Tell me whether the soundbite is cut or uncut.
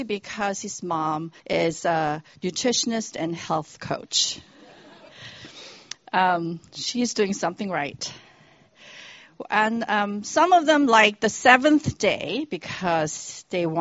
cut